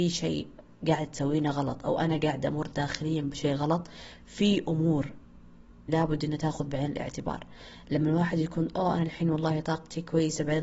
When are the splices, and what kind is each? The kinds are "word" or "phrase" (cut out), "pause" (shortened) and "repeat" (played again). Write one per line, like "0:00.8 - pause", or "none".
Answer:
0:05.9 - word